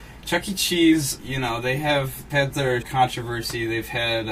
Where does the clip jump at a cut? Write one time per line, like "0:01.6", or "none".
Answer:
0:01.2
0:02.3
0:02.8